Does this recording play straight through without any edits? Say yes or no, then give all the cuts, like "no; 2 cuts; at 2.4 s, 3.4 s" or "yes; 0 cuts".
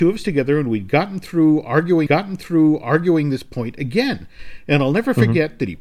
no; 1 cut; at 2.1 s